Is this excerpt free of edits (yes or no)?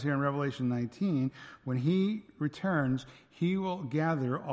yes